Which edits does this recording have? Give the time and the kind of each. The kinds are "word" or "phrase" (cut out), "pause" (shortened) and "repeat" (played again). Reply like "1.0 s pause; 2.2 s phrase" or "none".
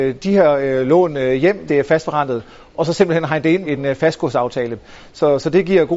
1.7 s word; 3.6 s word